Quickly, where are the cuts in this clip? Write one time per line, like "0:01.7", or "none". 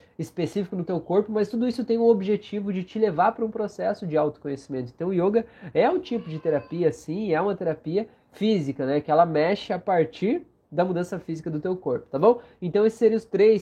none